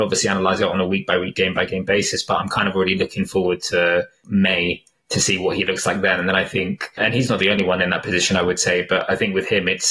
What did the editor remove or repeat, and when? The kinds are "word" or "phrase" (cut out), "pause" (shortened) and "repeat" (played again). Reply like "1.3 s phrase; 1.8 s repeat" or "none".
none